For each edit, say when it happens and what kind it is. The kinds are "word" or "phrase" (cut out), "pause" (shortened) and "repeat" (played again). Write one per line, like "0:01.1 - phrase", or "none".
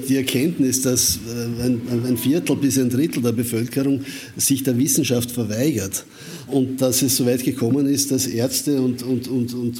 0:06.5 - word